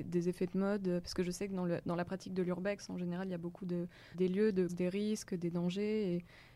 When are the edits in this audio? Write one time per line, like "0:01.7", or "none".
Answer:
0:04.1
0:04.7